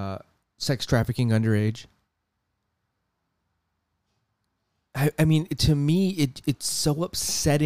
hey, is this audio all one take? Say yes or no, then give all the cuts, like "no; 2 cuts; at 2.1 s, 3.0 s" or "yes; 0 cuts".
yes; 0 cuts